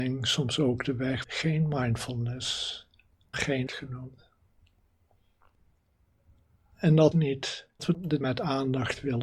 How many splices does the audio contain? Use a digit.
6